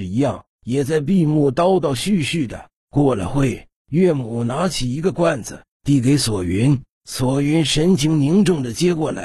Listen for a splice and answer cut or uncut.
cut